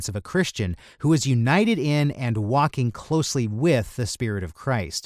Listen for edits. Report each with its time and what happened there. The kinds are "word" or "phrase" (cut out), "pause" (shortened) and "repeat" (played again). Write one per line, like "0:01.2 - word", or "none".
none